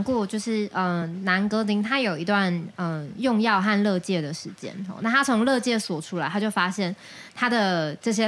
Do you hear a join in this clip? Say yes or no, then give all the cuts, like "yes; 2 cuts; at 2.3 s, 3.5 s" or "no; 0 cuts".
no; 0 cuts